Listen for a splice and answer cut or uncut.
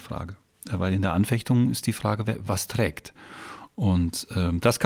uncut